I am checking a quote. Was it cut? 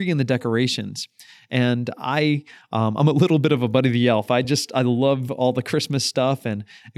no; 0 cuts

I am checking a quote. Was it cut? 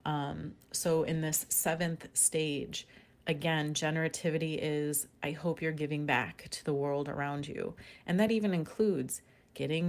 no; 0 cuts

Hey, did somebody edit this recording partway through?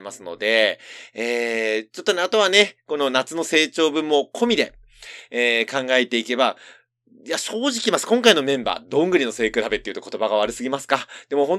no; 0 cuts

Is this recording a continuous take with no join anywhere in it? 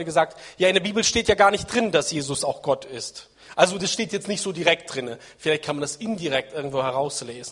yes; 0 cuts

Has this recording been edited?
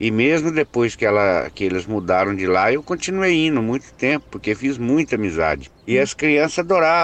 no; 0 cuts

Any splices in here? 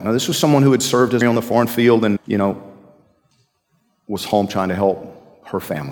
yes; 2 cuts; at 1.2 s, 2.2 s

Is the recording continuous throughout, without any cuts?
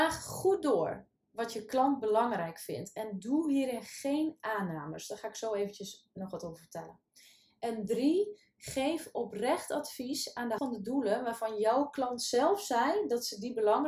no; 1 cut; at 10.6 s

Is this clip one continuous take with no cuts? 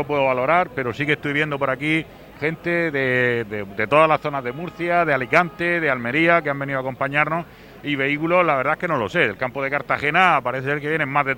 no; 1 cut; at 3.5 s

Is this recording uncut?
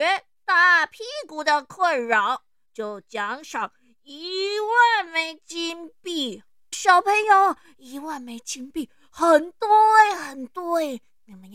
no; 1 cut; at 6.7 s

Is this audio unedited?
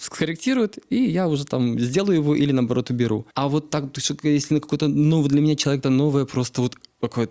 no; 2 cuts; at 3.3 s, 5.8 s

